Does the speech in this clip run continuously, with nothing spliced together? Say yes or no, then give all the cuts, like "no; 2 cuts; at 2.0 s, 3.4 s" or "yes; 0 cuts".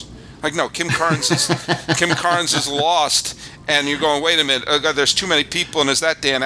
yes; 0 cuts